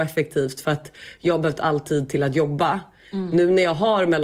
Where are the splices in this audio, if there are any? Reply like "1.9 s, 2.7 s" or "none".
none